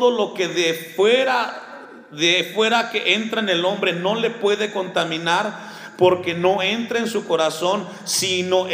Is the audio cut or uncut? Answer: uncut